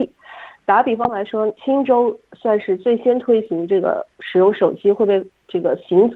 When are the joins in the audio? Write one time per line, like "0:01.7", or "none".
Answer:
0:01.6